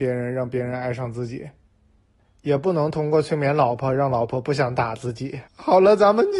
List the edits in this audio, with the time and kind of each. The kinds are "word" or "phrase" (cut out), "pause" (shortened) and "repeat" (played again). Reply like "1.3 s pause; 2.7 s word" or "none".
5.5 s pause